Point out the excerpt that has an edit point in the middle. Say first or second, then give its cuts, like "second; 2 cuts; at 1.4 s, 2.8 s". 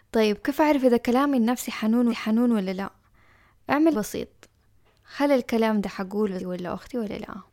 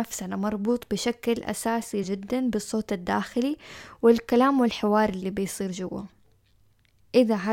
first; 3 cuts; at 2.1 s, 3.9 s, 6.4 s